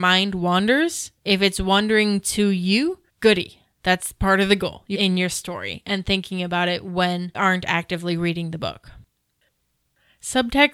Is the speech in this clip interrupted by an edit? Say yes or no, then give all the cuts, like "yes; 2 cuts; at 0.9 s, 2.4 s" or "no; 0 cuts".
yes; 4 cuts; at 1.2 s, 3.1 s, 4.9 s, 7.3 s